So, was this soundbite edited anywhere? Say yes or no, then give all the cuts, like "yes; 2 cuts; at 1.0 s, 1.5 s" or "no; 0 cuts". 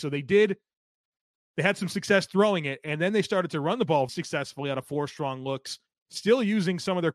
yes; 1 cut; at 4.1 s